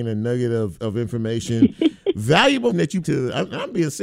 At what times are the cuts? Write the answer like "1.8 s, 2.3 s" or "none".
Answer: 2.7 s, 3.0 s